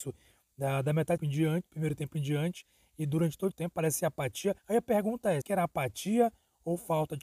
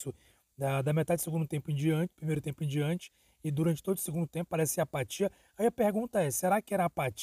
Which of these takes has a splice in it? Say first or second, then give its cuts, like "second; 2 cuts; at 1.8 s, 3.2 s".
first; 4 cuts; at 1.2 s, 3.5 s, 4.6 s, 5.4 s